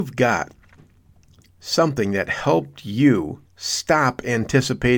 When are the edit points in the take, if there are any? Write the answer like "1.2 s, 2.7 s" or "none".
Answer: 3.5 s